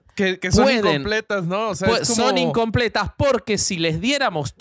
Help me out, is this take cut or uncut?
uncut